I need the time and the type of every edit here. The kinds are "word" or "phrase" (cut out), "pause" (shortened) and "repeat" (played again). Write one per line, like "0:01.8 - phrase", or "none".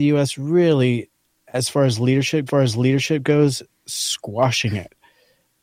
0:02.5 - repeat